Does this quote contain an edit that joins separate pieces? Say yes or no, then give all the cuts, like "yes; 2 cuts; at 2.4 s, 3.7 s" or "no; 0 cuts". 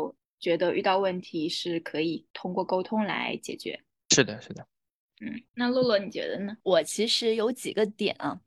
yes; 3 cuts; at 2.3 s, 5.5 s, 6.6 s